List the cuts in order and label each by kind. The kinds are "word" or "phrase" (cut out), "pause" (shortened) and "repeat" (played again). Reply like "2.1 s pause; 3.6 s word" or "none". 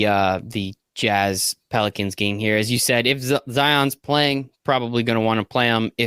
none